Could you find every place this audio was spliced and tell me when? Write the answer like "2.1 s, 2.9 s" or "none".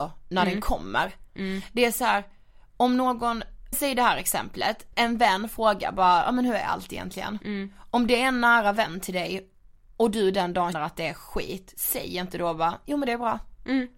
3.7 s, 4.9 s, 10.7 s